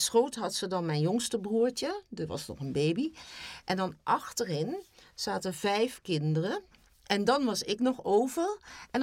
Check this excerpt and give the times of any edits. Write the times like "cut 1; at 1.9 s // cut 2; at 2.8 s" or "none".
none